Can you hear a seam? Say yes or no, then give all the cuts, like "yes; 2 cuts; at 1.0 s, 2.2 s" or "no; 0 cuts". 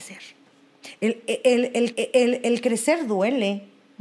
yes; 1 cut; at 1.9 s